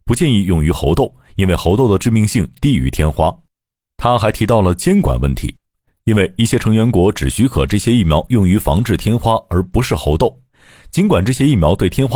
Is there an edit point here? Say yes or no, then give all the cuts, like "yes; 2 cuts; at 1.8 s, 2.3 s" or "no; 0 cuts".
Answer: no; 0 cuts